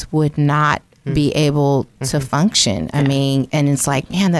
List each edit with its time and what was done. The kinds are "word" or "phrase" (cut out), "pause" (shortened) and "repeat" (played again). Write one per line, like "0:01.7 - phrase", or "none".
0:03.5 - phrase